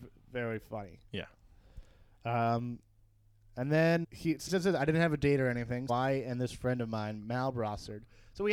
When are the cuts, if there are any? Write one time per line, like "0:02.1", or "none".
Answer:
0:04.0
0:04.5
0:05.9

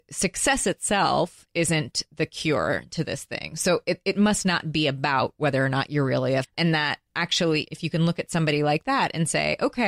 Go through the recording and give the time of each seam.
0:06.4

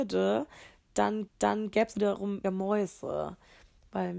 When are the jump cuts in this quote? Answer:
0:01.3
0:01.9
0:02.4

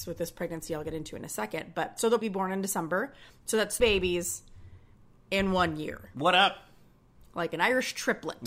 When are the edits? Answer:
0:02.2
0:03.8

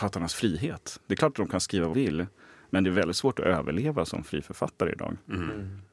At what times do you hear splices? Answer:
0:01.9

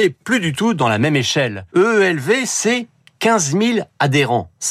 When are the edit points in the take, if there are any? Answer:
0:01.7

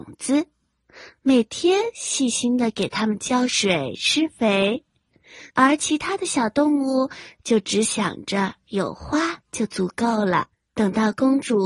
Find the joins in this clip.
0:05.5
0:10.5

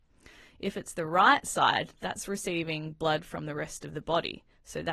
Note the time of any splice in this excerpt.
none

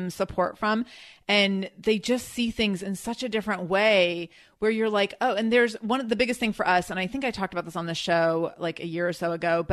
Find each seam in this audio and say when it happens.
none

